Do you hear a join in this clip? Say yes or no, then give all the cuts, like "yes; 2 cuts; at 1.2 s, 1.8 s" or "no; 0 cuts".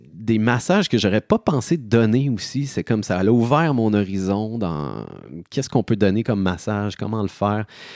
no; 0 cuts